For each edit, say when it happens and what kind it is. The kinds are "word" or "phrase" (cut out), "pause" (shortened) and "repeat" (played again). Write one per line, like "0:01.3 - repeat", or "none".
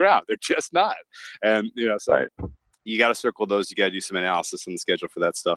none